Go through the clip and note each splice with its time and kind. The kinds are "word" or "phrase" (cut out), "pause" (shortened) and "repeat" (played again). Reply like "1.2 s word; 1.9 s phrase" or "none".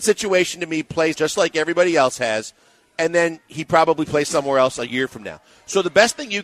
1.1 s word